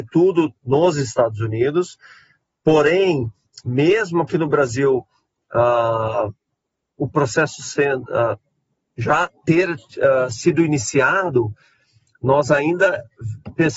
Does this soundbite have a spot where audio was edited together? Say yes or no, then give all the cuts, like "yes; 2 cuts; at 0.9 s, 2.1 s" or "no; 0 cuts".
no; 0 cuts